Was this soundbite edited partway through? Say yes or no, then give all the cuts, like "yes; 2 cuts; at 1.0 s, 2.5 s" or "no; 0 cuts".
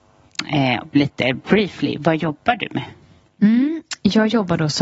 no; 0 cuts